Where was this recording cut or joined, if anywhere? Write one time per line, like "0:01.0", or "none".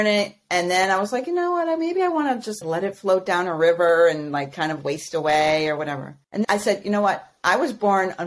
0:02.6
0:06.4

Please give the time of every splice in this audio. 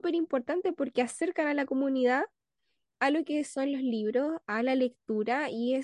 none

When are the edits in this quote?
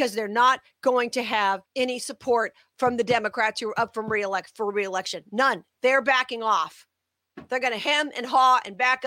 0:01.6
0:05.7

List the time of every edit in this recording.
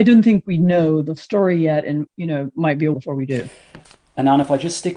0:01.2
0:02.1
0:02.9

